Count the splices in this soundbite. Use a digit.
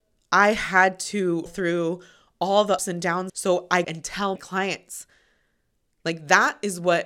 5